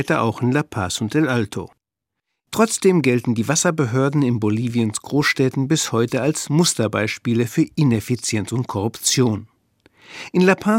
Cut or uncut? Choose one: uncut